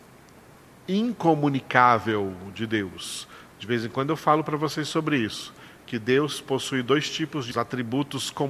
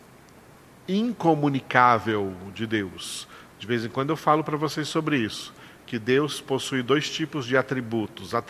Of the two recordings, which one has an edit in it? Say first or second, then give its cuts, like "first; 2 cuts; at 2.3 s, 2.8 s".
first; 1 cut; at 7.5 s